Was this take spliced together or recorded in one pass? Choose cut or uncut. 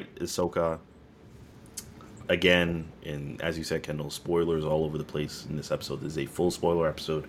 cut